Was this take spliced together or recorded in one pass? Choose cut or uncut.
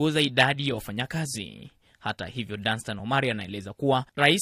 uncut